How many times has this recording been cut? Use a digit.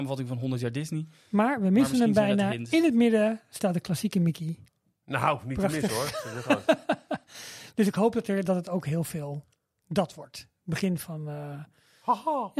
0